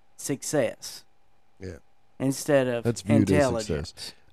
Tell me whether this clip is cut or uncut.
uncut